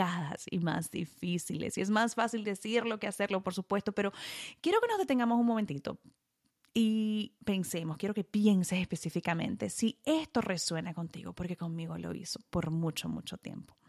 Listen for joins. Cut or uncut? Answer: cut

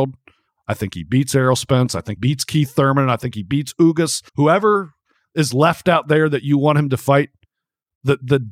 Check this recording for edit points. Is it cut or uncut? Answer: cut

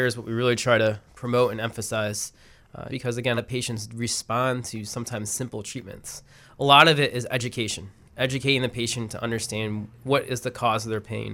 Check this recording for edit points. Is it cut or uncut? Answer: cut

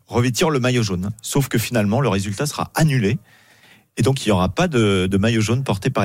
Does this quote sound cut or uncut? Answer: uncut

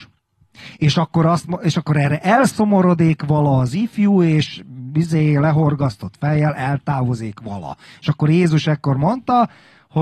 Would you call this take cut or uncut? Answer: uncut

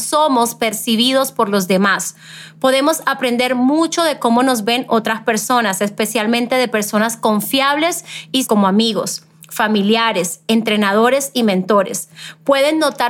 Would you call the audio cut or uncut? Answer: cut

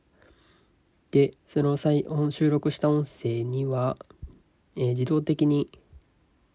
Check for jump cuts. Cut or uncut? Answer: cut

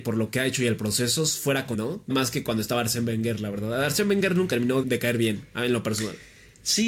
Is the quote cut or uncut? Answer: cut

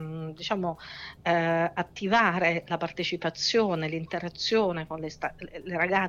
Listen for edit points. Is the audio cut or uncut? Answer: uncut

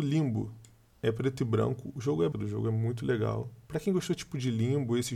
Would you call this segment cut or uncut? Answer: cut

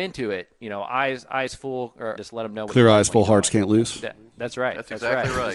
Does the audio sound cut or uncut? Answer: cut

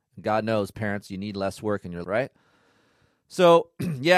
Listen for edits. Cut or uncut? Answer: cut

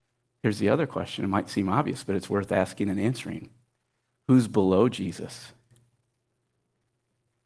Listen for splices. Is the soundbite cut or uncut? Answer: uncut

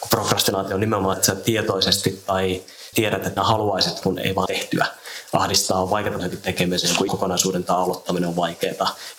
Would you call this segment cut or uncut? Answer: cut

